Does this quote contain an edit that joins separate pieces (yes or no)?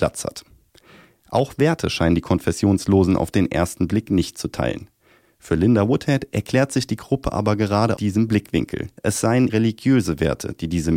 yes